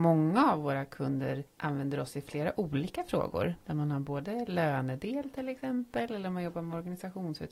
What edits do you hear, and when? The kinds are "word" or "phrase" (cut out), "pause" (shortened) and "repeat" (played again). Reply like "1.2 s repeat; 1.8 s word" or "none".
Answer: 1.5 s pause

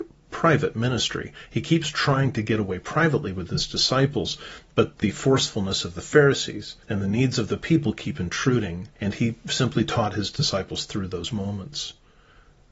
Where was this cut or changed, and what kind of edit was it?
6.8 s pause; 8.9 s pause

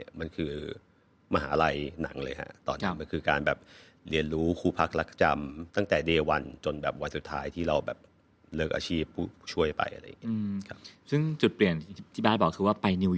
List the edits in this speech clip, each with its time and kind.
5.7 s pause

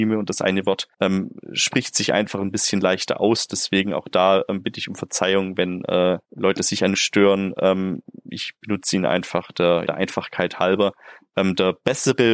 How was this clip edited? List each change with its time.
0.9 s pause; 6.2 s pause; 6.9 s phrase; 9.9 s word

